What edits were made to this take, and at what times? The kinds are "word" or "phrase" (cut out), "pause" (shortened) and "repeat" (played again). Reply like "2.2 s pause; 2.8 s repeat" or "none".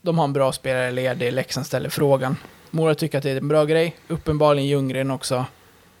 none